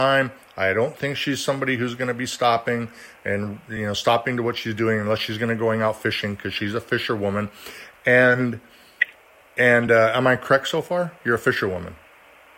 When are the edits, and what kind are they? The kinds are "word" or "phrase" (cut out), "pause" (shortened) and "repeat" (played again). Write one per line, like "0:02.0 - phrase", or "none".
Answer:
none

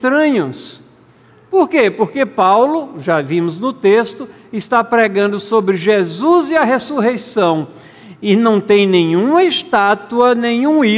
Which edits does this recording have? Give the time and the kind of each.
none

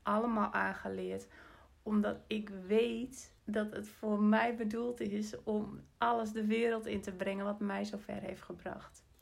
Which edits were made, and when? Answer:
0:03.4 - pause

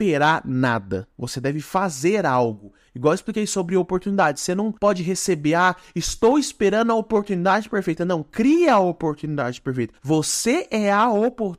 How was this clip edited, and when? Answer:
0:01.1 - pause
0:04.8 - pause
0:10.0 - pause

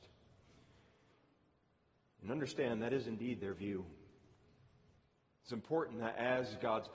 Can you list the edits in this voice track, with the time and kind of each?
none

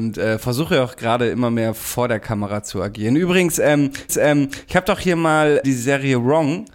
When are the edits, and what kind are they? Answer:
0:04.1 - repeat
0:05.6 - word

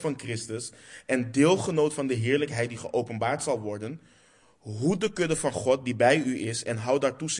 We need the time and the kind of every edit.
none

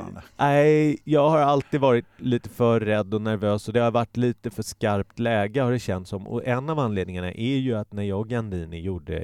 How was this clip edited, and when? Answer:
none

